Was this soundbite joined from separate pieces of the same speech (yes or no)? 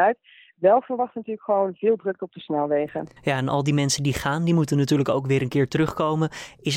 yes